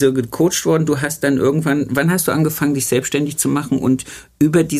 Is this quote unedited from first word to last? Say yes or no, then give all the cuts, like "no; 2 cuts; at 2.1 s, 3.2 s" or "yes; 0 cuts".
yes; 0 cuts